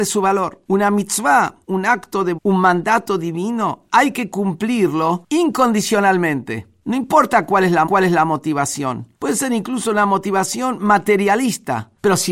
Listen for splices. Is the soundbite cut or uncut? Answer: cut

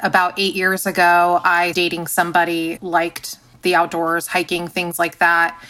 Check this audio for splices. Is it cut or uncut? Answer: cut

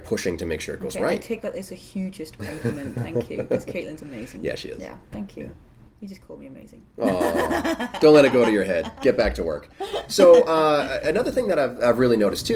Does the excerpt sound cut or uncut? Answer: uncut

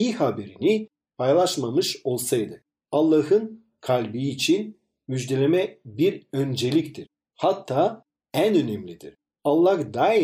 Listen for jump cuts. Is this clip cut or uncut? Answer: uncut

